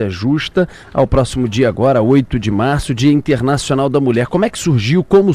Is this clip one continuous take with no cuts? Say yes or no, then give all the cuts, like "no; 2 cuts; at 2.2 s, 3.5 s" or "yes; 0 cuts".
yes; 0 cuts